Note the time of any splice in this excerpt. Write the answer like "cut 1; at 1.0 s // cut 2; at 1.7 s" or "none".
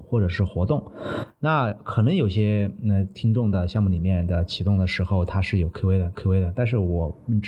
cut 1; at 6.1 s